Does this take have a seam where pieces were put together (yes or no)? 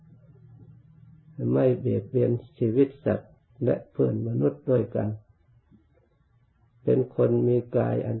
yes